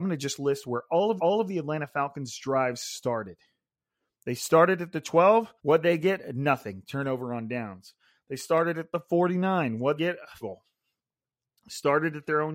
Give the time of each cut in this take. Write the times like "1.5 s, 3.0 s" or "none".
1.2 s, 5.6 s, 10.0 s, 10.4 s